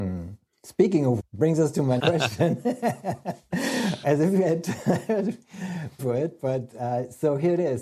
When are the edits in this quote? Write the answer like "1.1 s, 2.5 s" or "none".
1.2 s, 2.0 s, 4.0 s, 6.0 s